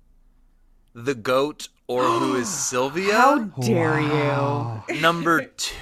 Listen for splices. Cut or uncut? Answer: uncut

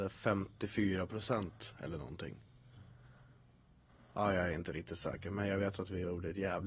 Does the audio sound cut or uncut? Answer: uncut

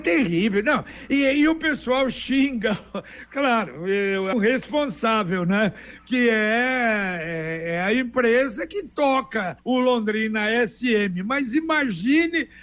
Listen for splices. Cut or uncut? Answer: cut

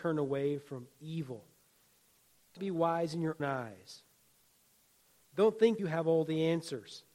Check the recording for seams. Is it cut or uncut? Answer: cut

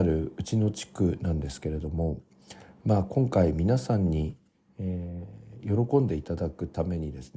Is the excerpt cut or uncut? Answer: uncut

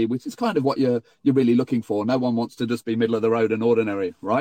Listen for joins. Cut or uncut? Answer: uncut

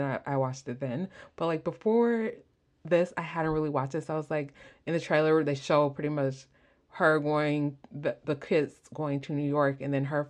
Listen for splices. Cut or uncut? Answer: uncut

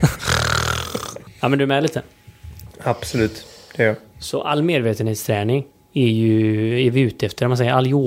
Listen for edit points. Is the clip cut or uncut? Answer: uncut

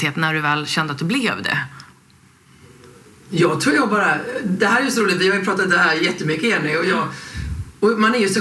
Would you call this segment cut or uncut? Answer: uncut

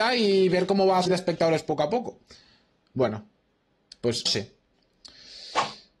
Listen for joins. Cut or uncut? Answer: cut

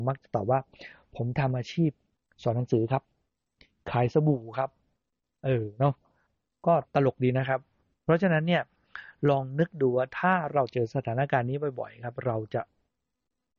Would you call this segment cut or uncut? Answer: uncut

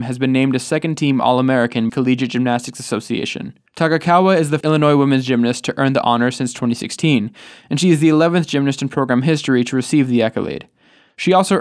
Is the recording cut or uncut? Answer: cut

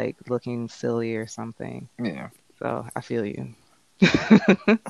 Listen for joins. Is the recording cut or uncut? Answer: cut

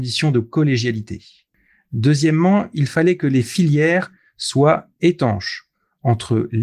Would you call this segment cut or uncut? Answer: uncut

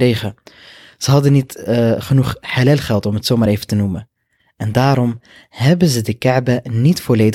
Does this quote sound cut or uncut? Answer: uncut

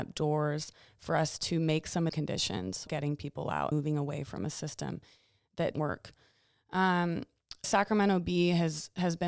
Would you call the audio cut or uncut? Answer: cut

